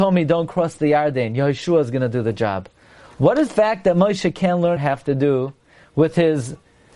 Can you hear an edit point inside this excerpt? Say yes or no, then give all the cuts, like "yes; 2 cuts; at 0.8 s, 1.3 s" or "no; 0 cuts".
yes; 2 cuts; at 3.5 s, 4.8 s